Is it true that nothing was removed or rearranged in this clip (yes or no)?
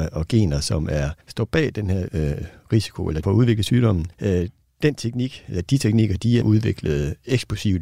no